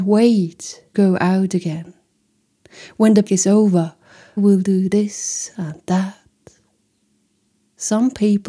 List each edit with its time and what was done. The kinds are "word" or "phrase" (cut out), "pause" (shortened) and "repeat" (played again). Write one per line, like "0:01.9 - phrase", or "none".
0:00.9 - word
0:03.3 - word
0:04.4 - word